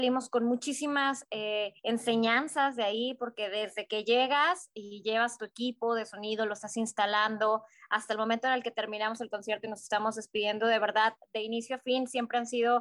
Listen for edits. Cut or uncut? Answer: cut